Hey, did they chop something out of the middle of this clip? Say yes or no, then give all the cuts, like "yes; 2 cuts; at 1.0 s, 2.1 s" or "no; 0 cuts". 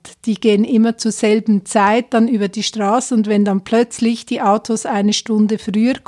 no; 0 cuts